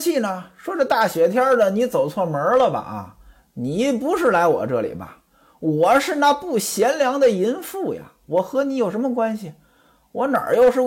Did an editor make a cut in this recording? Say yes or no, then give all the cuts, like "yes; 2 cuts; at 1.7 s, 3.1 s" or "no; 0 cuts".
no; 0 cuts